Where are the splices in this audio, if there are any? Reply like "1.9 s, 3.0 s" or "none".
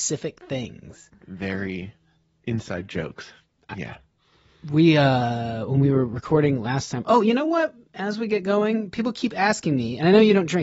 none